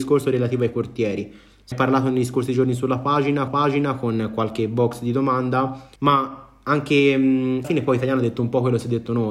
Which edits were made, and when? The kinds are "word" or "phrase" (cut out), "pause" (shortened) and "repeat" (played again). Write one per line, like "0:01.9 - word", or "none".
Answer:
0:01.7 - word
0:03.5 - repeat
0:06.0 - pause
0:07.6 - word